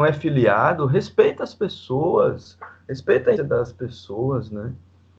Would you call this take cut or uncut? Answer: cut